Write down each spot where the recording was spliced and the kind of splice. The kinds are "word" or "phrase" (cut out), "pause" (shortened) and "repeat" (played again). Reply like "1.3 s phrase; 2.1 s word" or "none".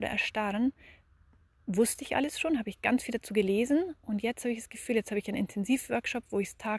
none